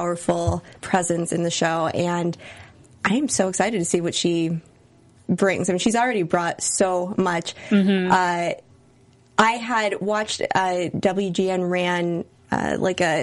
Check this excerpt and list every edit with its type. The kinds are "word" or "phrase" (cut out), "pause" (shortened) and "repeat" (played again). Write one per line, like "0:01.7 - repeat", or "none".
none

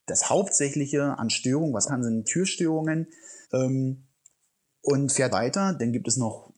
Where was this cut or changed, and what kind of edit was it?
0:01.9 - word
0:02.2 - word
0:03.4 - pause
0:05.3 - word

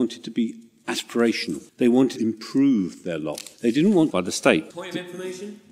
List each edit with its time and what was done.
0:01.7 - pause
0:02.2 - word
0:03.5 - pause
0:04.1 - phrase
0:04.7 - pause

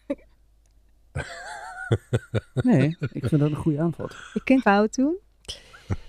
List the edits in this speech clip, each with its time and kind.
0:04.6 - phrase

